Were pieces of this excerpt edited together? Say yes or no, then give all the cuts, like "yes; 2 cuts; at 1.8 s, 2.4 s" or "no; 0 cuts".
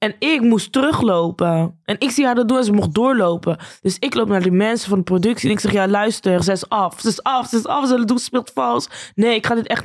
no; 0 cuts